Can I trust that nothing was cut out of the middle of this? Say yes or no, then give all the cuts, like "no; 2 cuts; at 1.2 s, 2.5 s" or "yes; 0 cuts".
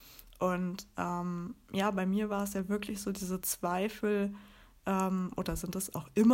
yes; 0 cuts